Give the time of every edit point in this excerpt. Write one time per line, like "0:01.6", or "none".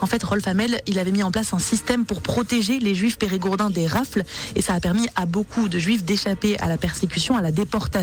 none